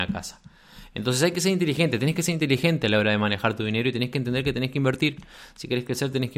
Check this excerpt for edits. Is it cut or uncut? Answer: uncut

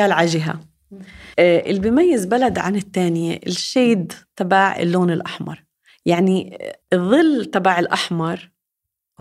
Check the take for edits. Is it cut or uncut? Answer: cut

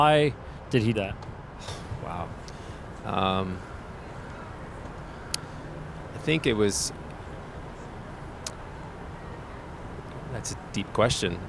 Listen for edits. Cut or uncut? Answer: cut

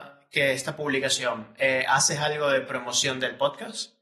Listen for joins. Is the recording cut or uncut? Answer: uncut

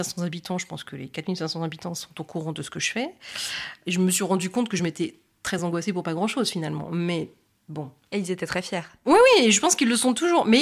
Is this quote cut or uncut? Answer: uncut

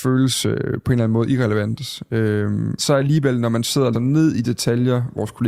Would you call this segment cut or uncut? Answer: cut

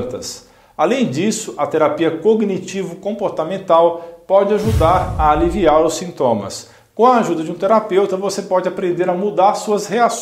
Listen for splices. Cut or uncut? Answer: uncut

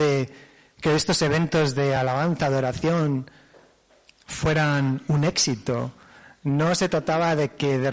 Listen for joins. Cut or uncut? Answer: uncut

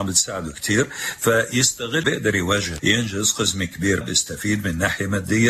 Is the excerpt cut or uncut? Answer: cut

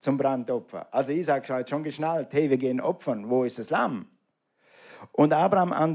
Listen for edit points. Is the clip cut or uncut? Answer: uncut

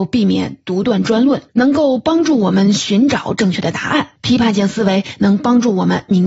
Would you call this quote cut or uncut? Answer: cut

